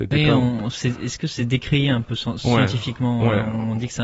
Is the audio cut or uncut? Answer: uncut